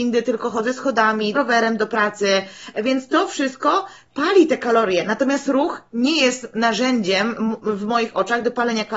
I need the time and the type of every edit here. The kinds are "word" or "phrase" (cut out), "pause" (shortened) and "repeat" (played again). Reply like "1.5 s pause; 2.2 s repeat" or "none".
1.3 s word